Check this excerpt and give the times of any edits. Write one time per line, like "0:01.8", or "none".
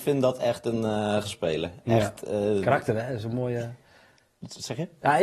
0:01.2